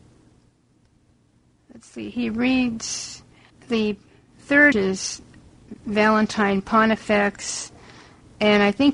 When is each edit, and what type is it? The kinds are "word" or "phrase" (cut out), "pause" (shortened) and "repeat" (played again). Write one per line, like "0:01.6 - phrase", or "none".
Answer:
0:03.5 - pause
0:04.7 - phrase